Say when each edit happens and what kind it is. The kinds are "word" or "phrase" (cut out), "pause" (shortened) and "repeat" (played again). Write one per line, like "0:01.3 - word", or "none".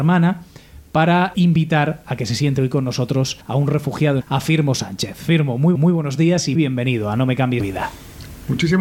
0:01.3 - word
0:03.4 - pause
0:04.2 - phrase
0:05.7 - repeat
0:06.5 - word
0:07.6 - word